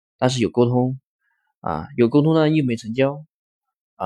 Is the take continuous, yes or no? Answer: yes